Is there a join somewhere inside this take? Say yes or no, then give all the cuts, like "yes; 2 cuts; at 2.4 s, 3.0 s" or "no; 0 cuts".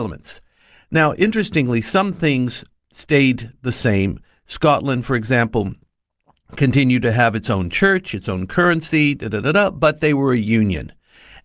no; 0 cuts